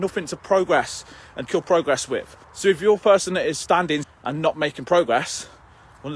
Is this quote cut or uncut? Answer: cut